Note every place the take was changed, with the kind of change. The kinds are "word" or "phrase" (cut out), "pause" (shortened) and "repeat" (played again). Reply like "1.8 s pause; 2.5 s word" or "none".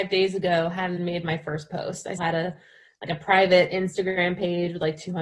1.0 s word; 2.2 s word